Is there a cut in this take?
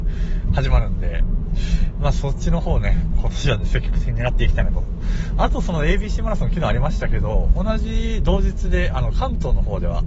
no; 0 cuts

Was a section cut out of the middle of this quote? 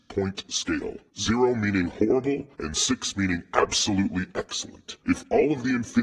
yes; 3 cuts; at 1.1 s, 2.5 s, 5.0 s

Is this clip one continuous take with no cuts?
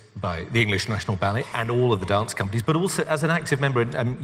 yes; 0 cuts

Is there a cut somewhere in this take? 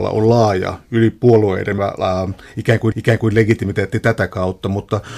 yes; 2 cuts; at 1.8 s, 2.9 s

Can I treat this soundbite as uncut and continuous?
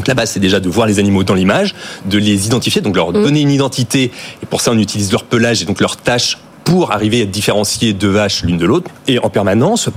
yes; 0 cuts

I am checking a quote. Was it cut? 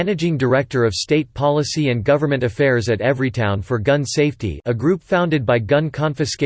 no; 0 cuts

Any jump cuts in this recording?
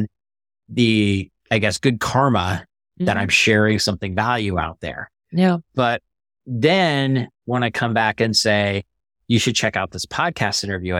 no; 0 cuts

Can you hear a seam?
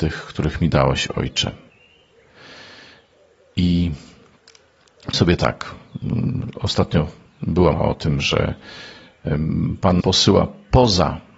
yes; 3 cuts; at 5.1 s, 7.7 s, 10.0 s

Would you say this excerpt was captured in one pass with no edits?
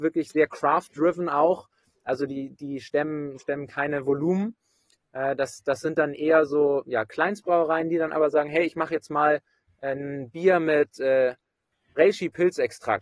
yes; 0 cuts

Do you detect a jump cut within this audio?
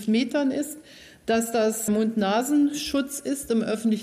yes; 1 cut; at 1.9 s

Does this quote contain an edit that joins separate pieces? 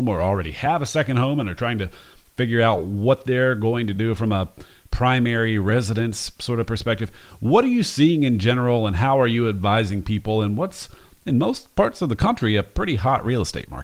no; 0 cuts

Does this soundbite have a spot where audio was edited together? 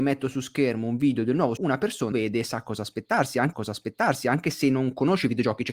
yes; 3 cuts; at 1.6 s, 2.1 s, 3.5 s

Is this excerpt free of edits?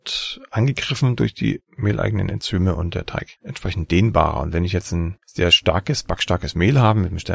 no; 2 cuts; at 3.4 s, 5.2 s

